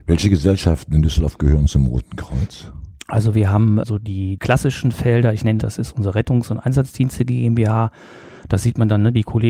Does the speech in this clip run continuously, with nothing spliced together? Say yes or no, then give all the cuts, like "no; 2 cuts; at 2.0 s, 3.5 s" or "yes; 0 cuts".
no; 1 cut; at 5.6 s